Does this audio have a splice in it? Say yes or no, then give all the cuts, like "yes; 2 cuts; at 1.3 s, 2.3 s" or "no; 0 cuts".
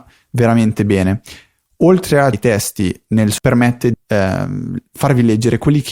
yes; 3 cuts; at 2.3 s, 3.4 s, 3.9 s